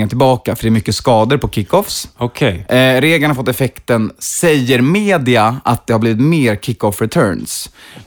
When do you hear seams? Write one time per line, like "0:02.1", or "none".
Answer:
none